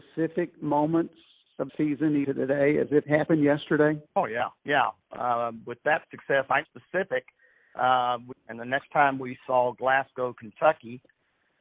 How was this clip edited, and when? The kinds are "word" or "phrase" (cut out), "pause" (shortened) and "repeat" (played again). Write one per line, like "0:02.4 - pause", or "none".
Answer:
0:01.7 - word
0:02.2 - word
0:03.0 - word
0:04.1 - pause
0:04.6 - pause
0:06.6 - word
0:08.3 - phrase